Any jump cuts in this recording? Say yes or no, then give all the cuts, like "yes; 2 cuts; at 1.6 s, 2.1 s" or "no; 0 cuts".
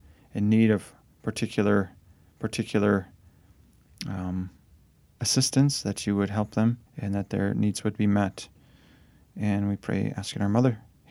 yes; 2 cuts; at 2.3 s, 6.9 s